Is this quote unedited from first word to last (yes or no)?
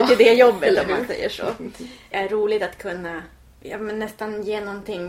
no